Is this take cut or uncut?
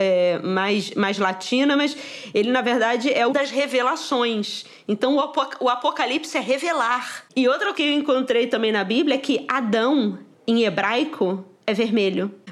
cut